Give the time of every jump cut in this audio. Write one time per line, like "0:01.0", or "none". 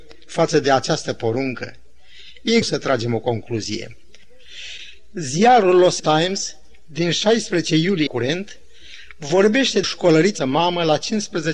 0:02.6
0:06.0
0:08.1
0:09.8
0:10.4